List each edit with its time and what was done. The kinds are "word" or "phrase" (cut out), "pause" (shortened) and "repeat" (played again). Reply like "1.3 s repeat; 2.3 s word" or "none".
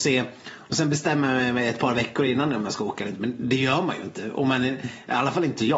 none